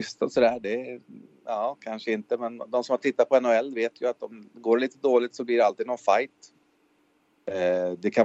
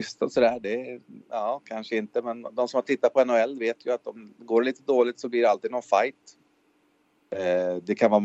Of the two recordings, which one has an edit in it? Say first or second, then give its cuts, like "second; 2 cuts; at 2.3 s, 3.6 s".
second; 1 cut; at 1.2 s